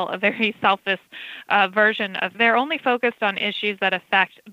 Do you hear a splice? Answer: yes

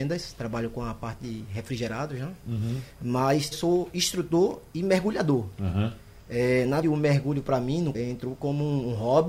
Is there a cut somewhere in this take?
yes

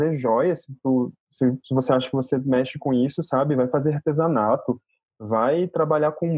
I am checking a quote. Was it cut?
no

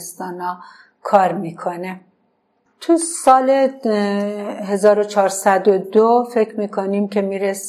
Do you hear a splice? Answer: no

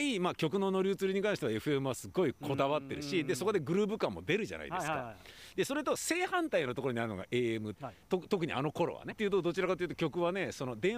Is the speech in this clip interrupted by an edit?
yes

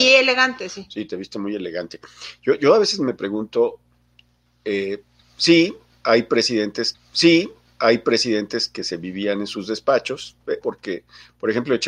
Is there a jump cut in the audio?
yes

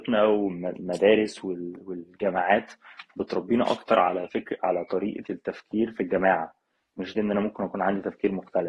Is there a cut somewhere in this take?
yes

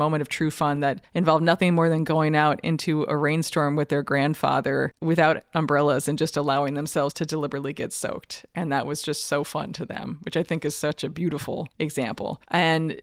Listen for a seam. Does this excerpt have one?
yes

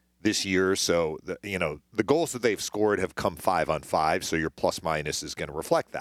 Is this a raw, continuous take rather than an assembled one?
yes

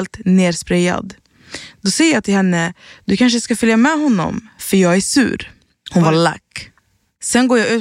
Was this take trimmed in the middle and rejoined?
no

